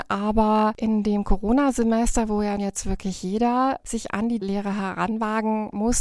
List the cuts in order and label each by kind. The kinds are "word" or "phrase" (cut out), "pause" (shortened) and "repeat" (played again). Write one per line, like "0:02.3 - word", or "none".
0:02.6 - word
0:04.4 - word